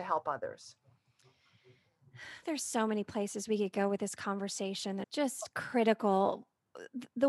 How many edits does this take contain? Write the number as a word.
one